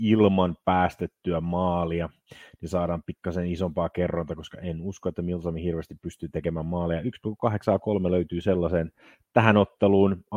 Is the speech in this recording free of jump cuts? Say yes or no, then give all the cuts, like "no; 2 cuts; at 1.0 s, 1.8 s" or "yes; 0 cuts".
yes; 0 cuts